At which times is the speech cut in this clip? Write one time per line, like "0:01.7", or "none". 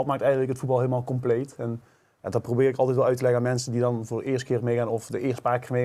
none